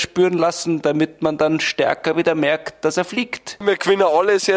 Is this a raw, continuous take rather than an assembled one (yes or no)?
yes